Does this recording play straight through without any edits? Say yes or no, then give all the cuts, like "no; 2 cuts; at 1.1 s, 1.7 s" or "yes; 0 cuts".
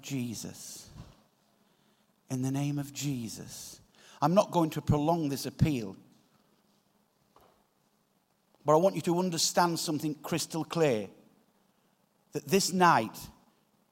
yes; 0 cuts